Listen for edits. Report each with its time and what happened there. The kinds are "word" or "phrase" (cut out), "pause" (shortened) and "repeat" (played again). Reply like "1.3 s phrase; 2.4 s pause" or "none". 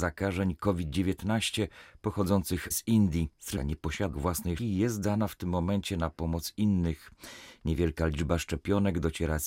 2.7 s word; 3.6 s word; 4.1 s word; 4.6 s word